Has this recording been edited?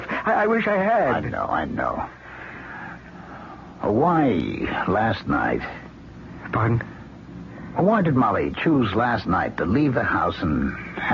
no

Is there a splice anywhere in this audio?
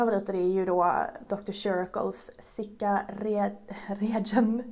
no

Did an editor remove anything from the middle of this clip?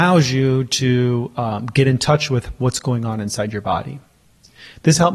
no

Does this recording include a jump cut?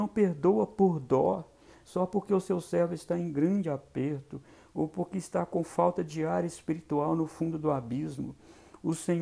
no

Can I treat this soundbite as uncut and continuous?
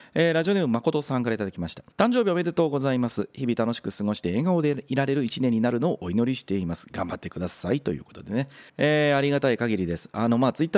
no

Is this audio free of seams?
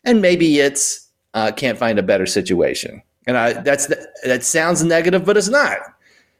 yes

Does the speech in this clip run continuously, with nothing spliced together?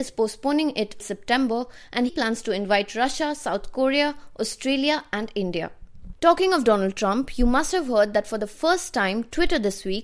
no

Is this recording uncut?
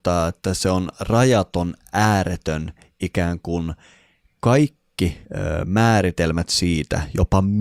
no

